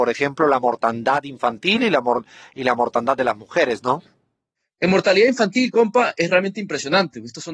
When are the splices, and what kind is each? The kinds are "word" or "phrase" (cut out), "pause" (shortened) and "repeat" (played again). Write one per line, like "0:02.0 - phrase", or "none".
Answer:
none